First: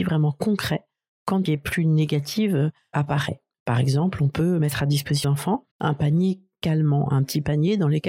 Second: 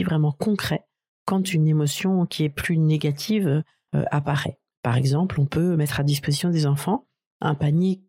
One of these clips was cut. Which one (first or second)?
first